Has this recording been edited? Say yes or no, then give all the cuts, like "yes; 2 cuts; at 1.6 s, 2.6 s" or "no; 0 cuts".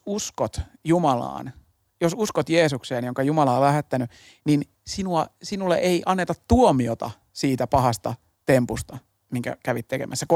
no; 0 cuts